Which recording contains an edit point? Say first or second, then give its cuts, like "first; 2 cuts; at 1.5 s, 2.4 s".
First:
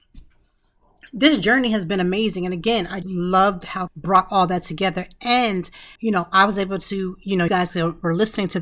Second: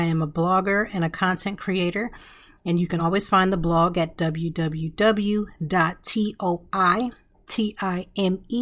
first; 4 cuts; at 3.0 s, 3.9 s, 6.0 s, 7.5 s